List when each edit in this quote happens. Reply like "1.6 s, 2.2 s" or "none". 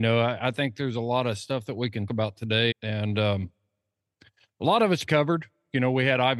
2.1 s, 2.7 s, 5.1 s